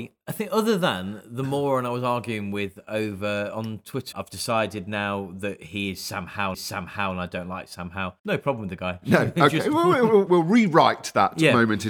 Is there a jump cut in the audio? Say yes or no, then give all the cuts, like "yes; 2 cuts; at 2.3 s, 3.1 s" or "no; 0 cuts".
yes; 4 cuts; at 4.1 s, 6.5 s, 8.2 s, 10.3 s